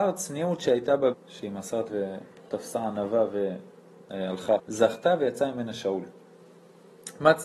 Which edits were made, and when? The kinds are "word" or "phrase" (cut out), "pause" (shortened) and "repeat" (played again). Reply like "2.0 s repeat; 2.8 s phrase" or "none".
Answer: 1.1 s word; 1.9 s word; 4.6 s word